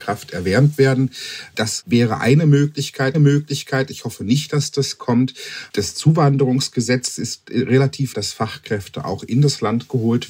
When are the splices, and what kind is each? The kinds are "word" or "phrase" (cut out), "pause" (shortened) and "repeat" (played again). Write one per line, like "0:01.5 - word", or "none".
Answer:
0:03.1 - repeat
0:08.1 - word